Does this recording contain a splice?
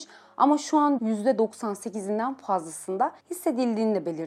yes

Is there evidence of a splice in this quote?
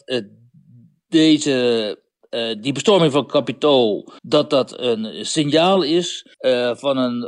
yes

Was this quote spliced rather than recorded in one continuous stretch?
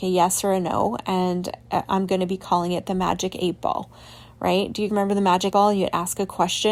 yes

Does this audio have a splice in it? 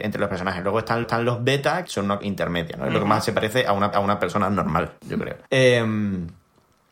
yes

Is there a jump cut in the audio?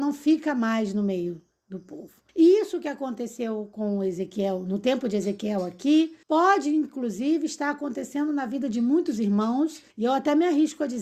yes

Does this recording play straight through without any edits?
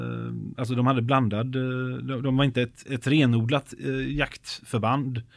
no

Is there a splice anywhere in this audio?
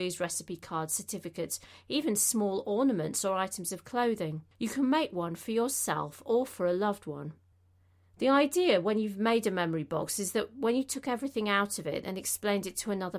yes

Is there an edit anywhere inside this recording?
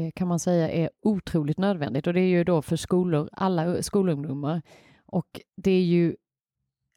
no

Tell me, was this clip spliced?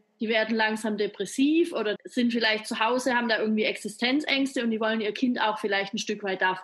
yes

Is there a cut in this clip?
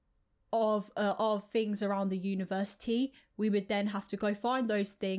no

